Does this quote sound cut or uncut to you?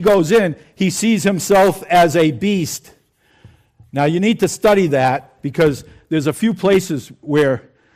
uncut